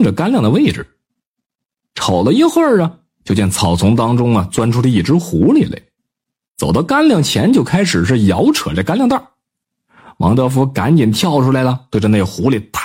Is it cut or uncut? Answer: uncut